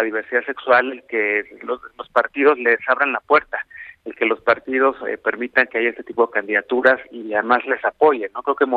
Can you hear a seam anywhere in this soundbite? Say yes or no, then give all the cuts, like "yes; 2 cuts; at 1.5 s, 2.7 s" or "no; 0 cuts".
no; 0 cuts